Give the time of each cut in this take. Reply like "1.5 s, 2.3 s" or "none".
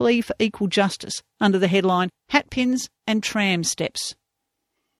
1.3 s